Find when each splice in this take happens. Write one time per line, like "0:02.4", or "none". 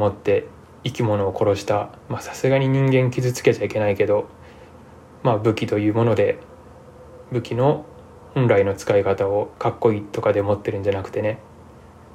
0:02.0
0:09.5